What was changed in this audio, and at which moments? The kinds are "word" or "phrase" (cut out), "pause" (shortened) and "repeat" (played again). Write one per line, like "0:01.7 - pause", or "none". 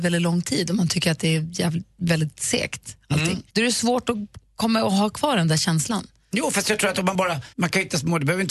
0:03.5 - pause
0:07.5 - pause